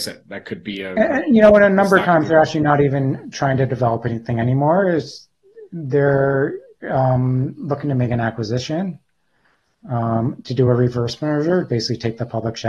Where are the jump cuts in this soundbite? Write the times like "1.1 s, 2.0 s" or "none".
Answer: none